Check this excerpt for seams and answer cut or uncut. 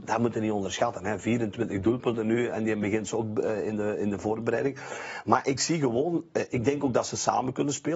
uncut